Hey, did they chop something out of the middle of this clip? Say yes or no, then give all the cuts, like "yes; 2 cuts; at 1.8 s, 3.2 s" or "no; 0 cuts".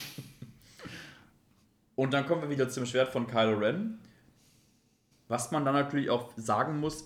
no; 0 cuts